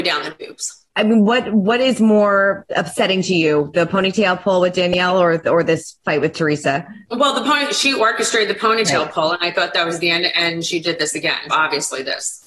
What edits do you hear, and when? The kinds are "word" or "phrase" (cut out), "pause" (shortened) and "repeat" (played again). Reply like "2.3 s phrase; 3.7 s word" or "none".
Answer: 7.0 s pause; 11.5 s word